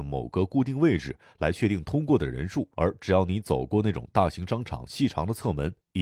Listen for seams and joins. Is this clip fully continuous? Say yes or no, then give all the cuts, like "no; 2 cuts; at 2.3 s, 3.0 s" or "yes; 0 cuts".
no; 1 cut; at 2.7 s